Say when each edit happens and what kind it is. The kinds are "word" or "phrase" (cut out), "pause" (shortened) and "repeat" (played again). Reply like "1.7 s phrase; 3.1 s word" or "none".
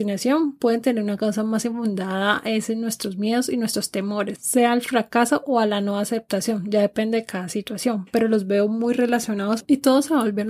none